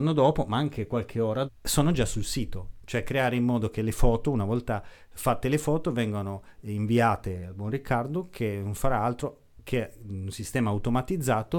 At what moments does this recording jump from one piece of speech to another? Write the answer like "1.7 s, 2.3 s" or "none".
1.5 s